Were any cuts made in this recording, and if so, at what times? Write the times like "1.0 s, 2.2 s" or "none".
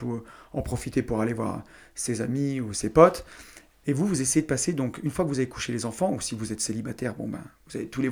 none